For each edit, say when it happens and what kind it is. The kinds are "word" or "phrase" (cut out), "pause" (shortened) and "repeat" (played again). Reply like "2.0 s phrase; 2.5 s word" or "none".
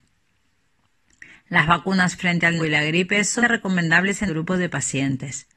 2.6 s word; 3.4 s word; 4.3 s word